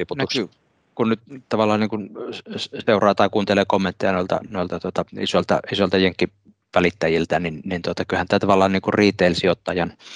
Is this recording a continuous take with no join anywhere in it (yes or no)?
no